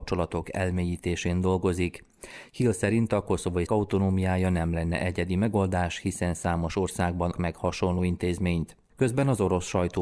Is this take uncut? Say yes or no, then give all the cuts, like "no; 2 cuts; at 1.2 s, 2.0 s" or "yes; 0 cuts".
no; 2 cuts; at 3.7 s, 7.3 s